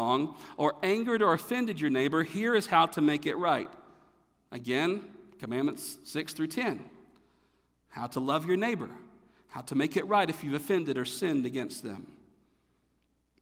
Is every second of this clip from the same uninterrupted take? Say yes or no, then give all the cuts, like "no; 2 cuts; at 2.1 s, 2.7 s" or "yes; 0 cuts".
yes; 0 cuts